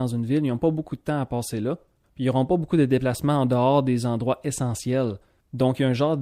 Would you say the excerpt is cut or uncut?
uncut